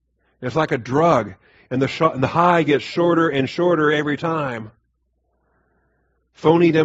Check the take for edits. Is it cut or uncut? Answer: uncut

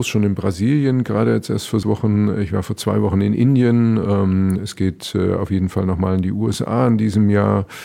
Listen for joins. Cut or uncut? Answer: cut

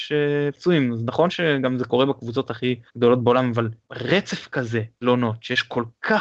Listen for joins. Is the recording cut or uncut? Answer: cut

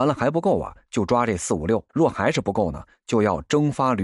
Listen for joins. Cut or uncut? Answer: cut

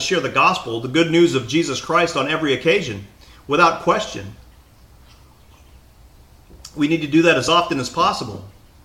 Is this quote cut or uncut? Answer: uncut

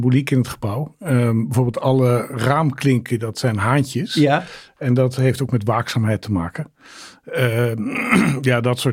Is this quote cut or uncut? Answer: uncut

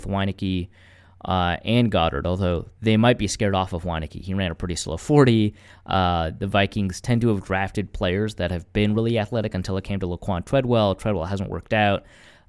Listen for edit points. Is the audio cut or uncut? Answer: uncut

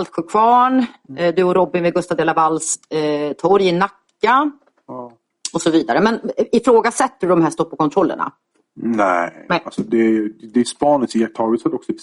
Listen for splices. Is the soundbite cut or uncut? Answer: uncut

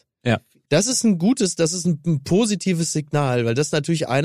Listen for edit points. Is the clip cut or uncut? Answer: uncut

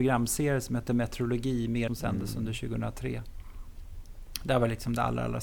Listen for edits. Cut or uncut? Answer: cut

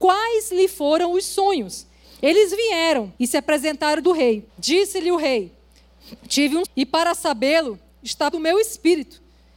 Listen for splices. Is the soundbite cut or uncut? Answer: cut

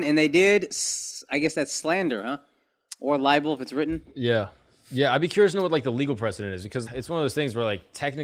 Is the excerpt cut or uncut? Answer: cut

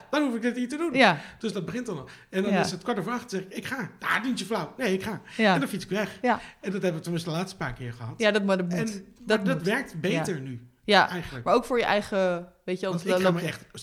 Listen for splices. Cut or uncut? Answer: uncut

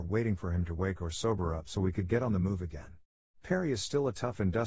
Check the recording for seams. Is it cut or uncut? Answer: cut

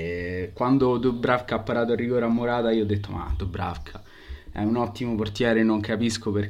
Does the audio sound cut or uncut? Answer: uncut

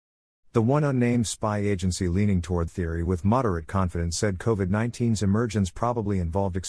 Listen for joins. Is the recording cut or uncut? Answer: cut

